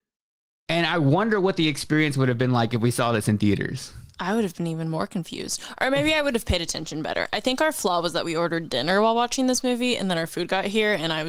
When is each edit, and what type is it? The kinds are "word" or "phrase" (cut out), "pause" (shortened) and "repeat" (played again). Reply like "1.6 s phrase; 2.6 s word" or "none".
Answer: none